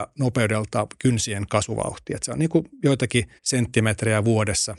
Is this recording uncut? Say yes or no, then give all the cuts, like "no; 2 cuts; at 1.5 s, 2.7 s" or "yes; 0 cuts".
no; 1 cut; at 3.4 s